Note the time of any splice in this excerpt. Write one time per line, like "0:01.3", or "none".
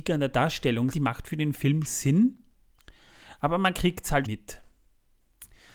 0:00.9
0:01.8
0:04.2